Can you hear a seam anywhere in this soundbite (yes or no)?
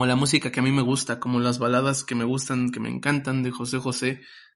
no